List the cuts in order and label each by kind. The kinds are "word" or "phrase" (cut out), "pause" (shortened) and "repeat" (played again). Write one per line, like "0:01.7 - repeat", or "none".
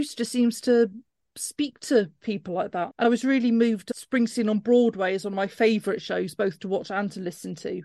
none